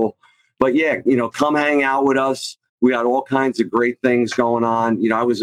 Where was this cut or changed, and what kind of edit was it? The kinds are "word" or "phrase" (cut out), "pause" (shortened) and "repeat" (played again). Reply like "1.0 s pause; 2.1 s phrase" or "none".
2.7 s pause

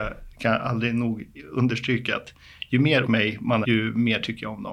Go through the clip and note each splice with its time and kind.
3.0 s word; 3.6 s word

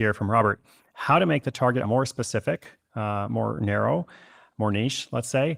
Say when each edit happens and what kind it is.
1.8 s word

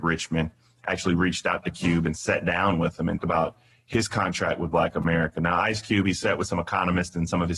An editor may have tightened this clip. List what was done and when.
3.2 s word

